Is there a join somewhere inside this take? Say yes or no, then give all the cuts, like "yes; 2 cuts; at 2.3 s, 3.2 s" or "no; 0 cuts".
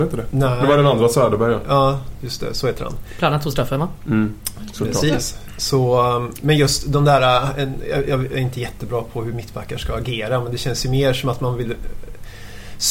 no; 0 cuts